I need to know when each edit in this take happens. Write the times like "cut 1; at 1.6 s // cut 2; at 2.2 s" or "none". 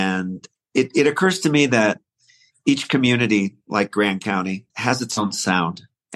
cut 1; at 4.7 s